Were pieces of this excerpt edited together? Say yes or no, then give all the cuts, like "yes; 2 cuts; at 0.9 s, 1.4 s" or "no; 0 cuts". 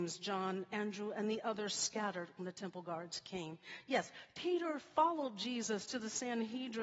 no; 0 cuts